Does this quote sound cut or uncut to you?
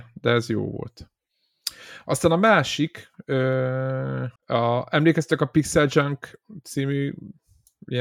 cut